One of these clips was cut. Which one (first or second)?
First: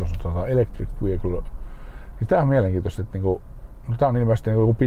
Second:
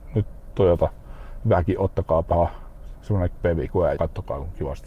second